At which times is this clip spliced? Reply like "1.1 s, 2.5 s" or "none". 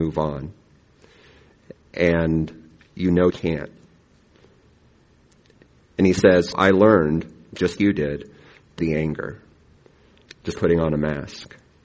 3.3 s, 6.5 s, 7.8 s, 8.8 s, 10.5 s